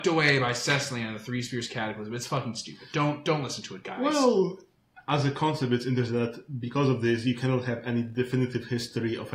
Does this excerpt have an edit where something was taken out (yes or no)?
no